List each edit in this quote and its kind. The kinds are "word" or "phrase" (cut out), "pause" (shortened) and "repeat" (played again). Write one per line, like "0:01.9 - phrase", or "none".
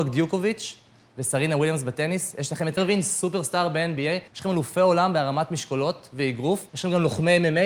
0:02.8 - word
0:04.3 - pause
0:06.7 - pause

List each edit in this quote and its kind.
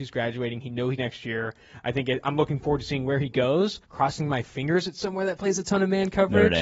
0:01.0 - phrase
0:03.8 - pause

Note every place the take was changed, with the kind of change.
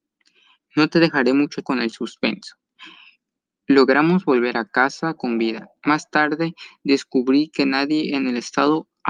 0:01.6 - word

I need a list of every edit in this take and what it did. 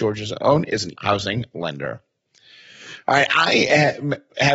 0:00.9 - word

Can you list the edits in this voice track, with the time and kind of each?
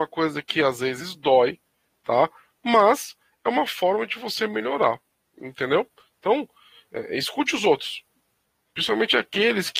none

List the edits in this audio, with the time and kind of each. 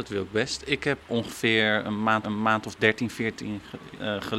0:01.0 - word
0:02.2 - repeat

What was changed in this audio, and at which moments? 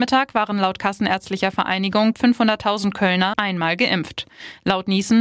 0:02.1 - word
0:03.3 - word

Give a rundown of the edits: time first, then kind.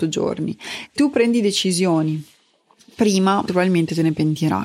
0:01.0 - word
0:03.5 - word

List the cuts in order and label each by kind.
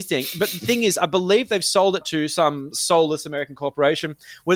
0:02.0 - word

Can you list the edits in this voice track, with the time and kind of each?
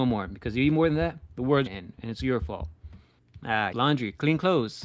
0:01.7 - word
0:03.7 - word

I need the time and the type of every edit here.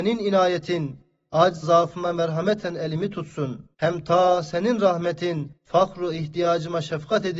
0:01.6 - word
0:03.7 - pause
0:05.6 - pause

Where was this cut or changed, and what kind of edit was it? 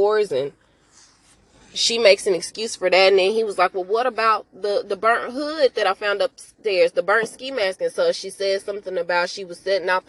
none

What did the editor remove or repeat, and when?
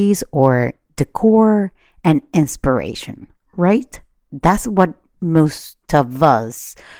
none

